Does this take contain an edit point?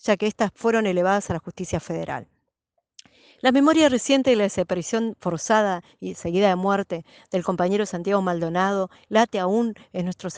no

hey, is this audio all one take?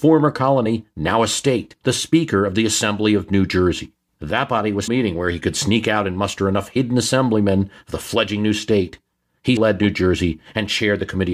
no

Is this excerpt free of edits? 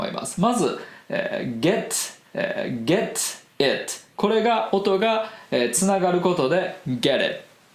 no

